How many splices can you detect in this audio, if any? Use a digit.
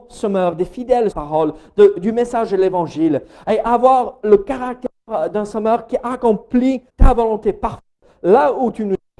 2